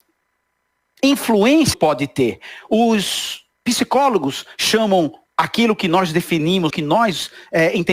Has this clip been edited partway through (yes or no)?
yes